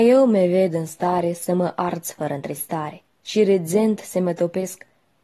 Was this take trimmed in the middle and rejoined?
yes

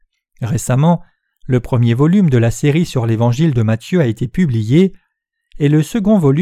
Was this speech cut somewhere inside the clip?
no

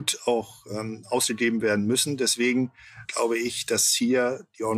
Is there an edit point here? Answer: yes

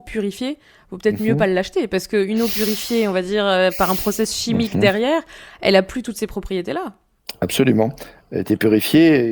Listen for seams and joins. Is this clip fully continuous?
yes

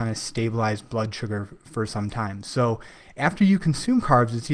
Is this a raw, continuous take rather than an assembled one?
yes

